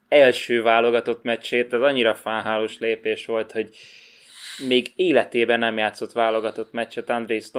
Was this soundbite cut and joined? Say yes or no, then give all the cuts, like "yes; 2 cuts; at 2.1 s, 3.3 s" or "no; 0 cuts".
no; 0 cuts